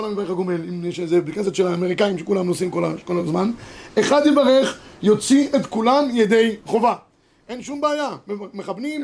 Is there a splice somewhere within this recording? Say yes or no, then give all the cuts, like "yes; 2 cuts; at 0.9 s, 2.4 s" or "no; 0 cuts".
no; 0 cuts